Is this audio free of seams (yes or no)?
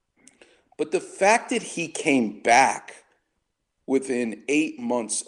yes